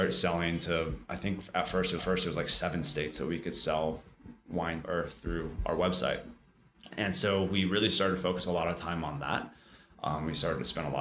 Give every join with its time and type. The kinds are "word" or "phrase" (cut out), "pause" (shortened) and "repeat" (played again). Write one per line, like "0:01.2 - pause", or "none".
0:02.0 - repeat
0:04.8 - phrase